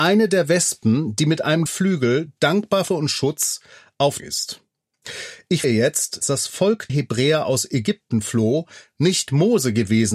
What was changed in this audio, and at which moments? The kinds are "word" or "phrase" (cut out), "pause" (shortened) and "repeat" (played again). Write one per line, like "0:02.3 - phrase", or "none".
0:01.7 - word
0:02.9 - phrase
0:04.2 - phrase
0:05.6 - word
0:06.2 - phrase
0:06.9 - word